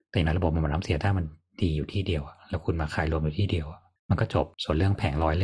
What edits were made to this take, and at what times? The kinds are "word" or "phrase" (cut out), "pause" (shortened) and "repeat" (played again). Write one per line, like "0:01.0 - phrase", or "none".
0:04.0 - pause
0:04.5 - pause